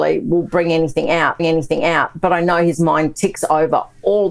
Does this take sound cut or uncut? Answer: cut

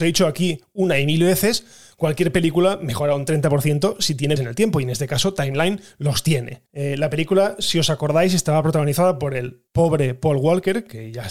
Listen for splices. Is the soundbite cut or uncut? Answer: cut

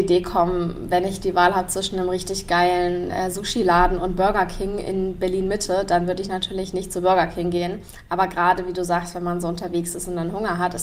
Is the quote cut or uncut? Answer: uncut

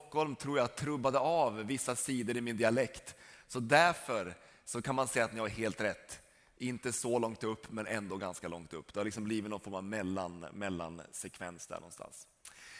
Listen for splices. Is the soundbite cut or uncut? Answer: uncut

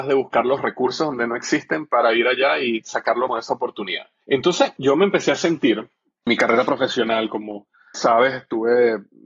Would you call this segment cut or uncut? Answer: cut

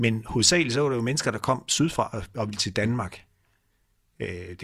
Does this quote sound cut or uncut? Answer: uncut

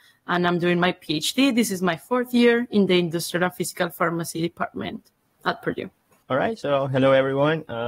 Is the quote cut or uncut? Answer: uncut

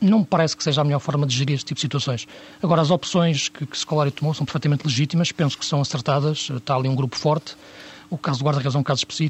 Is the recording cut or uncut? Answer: uncut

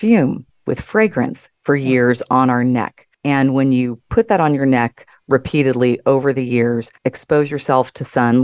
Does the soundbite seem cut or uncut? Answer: cut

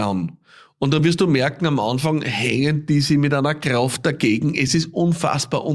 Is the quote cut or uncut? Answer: uncut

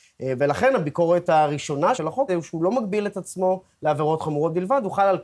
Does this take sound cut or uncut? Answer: cut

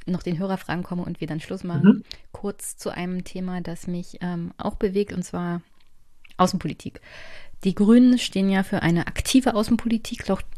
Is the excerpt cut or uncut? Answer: uncut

